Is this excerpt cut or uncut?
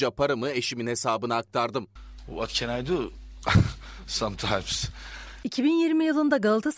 uncut